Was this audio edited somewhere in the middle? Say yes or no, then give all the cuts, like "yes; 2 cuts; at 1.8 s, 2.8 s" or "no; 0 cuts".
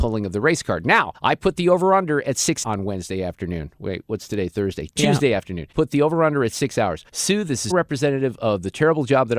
yes; 5 cuts; at 1.1 s, 2.6 s, 5.7 s, 7.1 s, 7.7 s